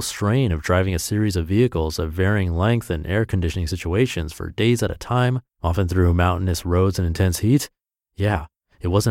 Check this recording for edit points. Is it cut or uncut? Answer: cut